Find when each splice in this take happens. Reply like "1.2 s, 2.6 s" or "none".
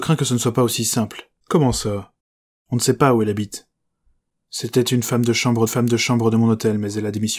1.4 s, 5.7 s